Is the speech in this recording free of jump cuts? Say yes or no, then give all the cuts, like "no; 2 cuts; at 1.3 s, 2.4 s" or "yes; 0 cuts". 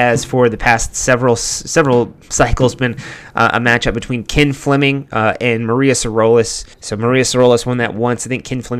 no; 1 cut; at 6.7 s